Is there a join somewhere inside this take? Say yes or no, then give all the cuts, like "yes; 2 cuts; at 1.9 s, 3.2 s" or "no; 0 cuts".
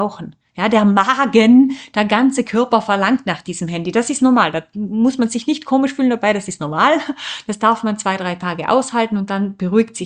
no; 0 cuts